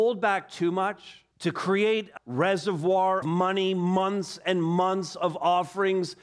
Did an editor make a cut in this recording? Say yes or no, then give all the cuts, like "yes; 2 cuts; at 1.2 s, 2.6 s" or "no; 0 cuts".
yes; 3 cuts; at 1.3 s, 2.2 s, 3.2 s